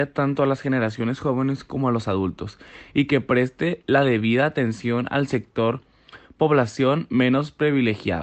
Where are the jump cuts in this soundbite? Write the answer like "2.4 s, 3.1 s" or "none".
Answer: none